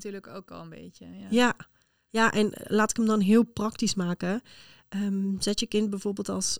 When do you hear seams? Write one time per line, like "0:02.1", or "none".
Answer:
none